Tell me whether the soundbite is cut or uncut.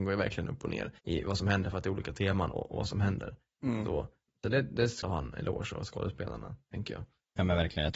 cut